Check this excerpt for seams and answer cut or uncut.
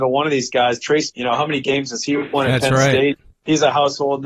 cut